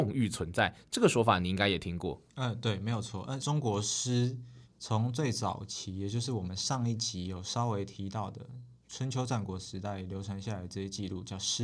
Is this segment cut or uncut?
cut